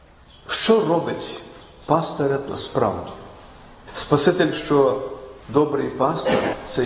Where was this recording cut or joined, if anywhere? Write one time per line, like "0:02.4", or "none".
0:02.5
0:04.5
0:05.4